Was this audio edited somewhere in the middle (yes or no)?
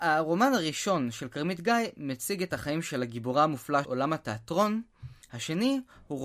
yes